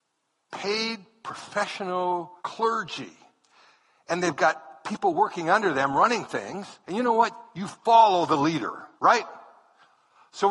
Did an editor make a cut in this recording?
yes; 3 cuts; at 2.4 s, 6.8 s, 8.9 s

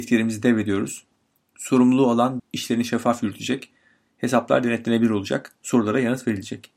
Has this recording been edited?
yes; 1 cut; at 2.4 s

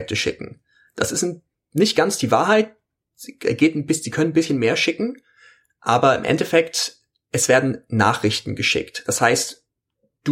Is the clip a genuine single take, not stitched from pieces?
yes; 0 cuts

